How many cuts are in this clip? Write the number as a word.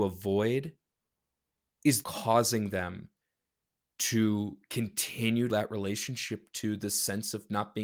two